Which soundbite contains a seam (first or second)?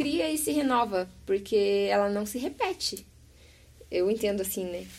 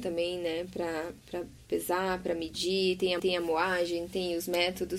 second